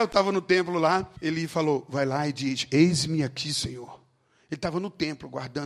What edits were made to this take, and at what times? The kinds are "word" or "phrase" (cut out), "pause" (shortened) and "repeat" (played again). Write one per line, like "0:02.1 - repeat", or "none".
0:01.2 - pause